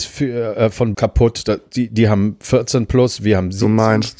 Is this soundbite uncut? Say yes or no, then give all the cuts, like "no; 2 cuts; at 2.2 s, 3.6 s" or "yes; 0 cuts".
no; 1 cut; at 0.9 s